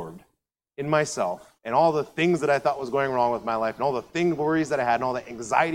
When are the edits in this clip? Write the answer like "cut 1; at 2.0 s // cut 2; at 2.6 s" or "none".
cut 1; at 1.6 s